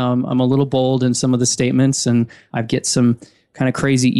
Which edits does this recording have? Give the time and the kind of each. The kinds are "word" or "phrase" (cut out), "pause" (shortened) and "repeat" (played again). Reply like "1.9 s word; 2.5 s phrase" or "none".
none